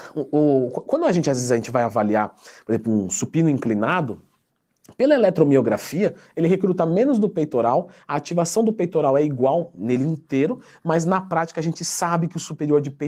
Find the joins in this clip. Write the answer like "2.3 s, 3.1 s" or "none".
none